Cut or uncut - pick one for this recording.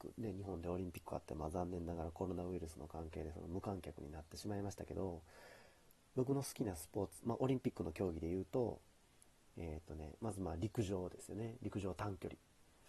uncut